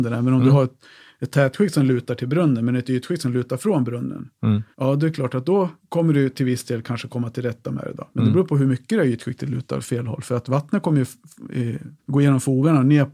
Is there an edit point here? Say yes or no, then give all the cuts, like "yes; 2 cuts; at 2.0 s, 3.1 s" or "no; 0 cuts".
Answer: yes; 4 cuts; at 4.7 s, 5.8 s, 8.1 s, 12.0 s